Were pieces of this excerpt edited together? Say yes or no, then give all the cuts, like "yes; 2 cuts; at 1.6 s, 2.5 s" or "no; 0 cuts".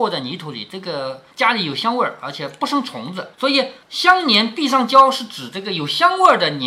yes; 3 cuts; at 1.3 s, 3.3 s, 3.8 s